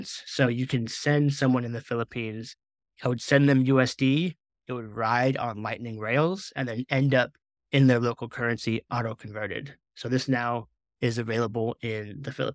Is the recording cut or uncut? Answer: uncut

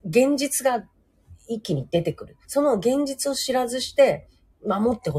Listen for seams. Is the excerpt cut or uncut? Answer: cut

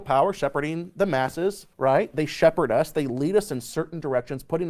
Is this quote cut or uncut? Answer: cut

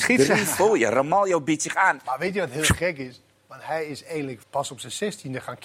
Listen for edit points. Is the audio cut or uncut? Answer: cut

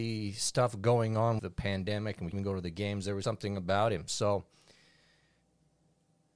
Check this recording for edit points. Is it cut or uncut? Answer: cut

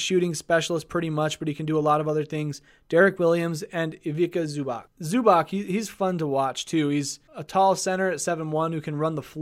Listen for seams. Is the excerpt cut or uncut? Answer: uncut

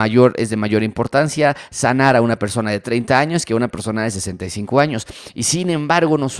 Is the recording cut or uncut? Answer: uncut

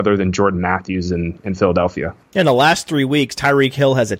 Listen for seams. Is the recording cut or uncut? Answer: uncut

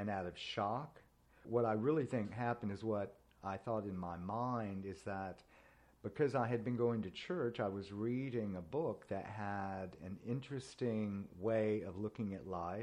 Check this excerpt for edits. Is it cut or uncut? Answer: cut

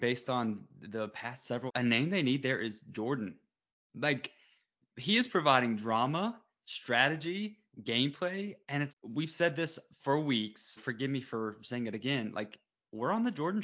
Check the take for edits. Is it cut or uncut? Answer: cut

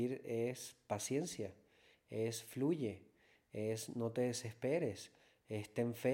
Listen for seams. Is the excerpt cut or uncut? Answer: uncut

